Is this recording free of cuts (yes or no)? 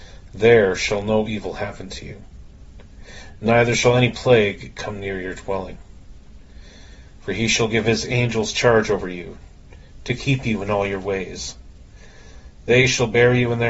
yes